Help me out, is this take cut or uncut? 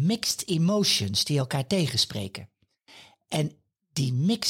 uncut